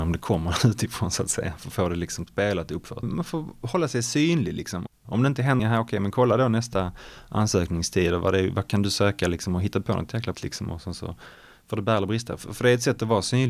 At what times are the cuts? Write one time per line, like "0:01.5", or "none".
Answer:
0:05.6
0:10.3